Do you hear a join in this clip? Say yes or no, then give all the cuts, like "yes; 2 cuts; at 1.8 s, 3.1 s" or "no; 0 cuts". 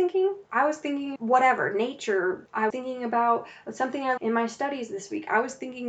yes; 3 cuts; at 1.2 s, 2.7 s, 4.2 s